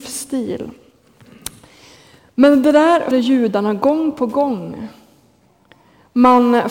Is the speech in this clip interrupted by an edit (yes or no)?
yes